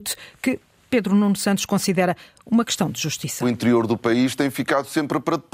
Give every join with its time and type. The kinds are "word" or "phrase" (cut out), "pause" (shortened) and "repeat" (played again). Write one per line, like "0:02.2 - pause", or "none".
none

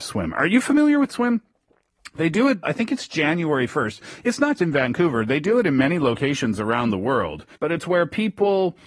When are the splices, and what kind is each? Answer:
0:01.1 - phrase
0:02.6 - word
0:04.6 - word
0:07.5 - pause

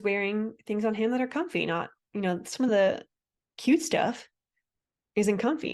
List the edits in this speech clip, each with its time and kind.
none

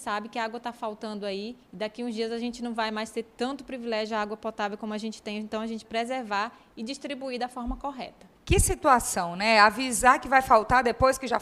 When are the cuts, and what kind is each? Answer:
0:01.6 - pause
0:05.8 - word
0:08.4 - pause

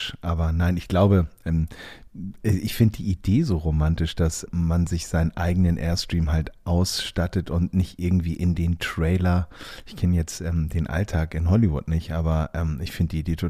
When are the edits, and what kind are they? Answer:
0:04.5 - word

